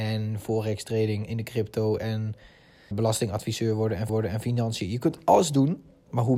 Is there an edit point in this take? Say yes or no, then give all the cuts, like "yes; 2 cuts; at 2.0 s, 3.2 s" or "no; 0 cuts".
yes; 3 cuts; at 1.3 s, 2.9 s, 4.1 s